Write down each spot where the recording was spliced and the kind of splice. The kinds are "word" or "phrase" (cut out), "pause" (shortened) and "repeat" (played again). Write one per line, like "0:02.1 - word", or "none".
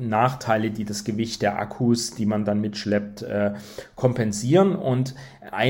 none